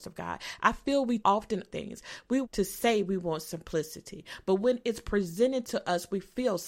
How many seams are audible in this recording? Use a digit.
3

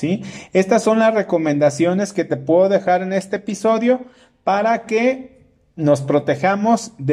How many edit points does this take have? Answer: 0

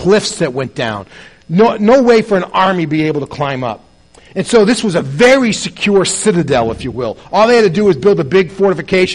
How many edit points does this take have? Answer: 0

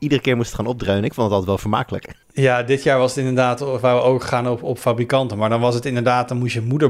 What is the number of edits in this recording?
1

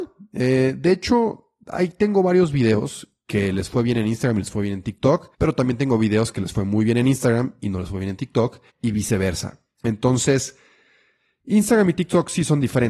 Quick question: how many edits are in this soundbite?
2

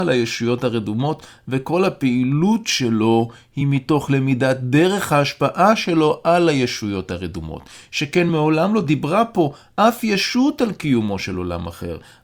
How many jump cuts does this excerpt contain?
0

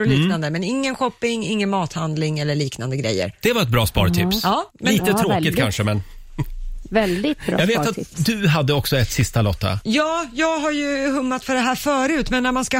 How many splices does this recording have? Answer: 1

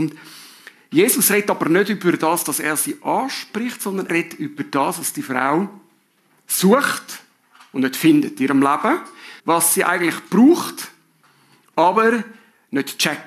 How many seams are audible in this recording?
2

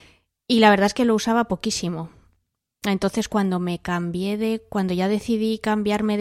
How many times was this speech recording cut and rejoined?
0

